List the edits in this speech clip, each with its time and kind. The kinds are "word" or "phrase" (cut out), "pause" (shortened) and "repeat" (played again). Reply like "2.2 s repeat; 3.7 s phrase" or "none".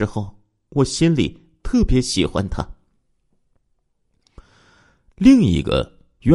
none